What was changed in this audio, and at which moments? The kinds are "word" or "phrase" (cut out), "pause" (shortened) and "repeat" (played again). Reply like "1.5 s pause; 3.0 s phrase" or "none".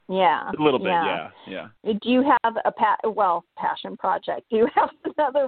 1.8 s pause; 3.5 s phrase